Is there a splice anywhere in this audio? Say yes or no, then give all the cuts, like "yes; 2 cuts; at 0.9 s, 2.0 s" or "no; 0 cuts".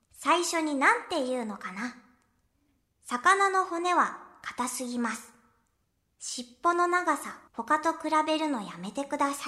yes; 1 cut; at 7.5 s